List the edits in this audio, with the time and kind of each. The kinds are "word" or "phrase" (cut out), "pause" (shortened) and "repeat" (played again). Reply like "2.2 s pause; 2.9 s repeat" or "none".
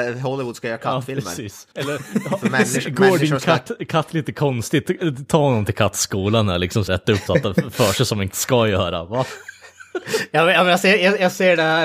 1.7 s pause; 6.9 s phrase; 7.3 s word; 8.3 s word